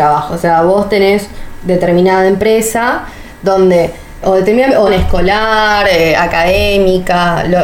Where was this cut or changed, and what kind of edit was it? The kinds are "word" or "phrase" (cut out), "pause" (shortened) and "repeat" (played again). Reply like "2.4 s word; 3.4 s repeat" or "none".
4.2 s word; 4.9 s phrase